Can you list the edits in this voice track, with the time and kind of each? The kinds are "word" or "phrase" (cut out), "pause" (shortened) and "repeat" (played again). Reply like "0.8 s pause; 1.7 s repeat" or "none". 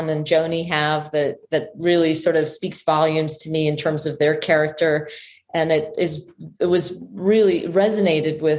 none